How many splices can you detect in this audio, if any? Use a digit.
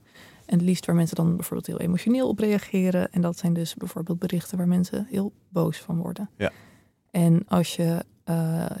0